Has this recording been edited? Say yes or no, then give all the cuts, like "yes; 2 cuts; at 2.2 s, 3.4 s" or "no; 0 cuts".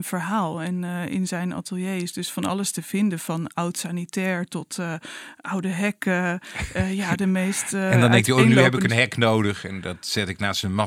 no; 0 cuts